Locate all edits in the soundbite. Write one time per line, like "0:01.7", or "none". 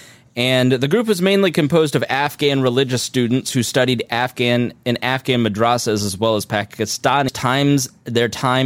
0:07.3